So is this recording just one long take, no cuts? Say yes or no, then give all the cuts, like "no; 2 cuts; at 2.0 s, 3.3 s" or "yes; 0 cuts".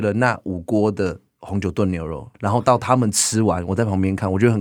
no; 1 cut; at 2.3 s